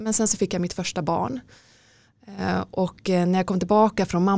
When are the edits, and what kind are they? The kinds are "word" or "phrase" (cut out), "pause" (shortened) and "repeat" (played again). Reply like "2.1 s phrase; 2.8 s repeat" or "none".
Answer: none